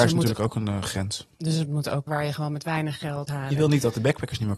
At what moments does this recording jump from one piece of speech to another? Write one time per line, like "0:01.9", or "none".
0:02.1
0:03.3